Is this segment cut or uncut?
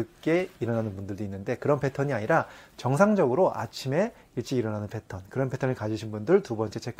uncut